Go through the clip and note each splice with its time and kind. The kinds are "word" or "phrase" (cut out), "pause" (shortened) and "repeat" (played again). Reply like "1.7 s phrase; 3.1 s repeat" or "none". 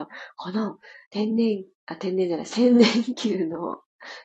1.0 s pause